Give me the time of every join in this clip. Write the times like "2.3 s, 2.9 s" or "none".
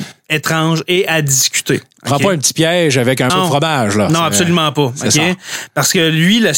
3.3 s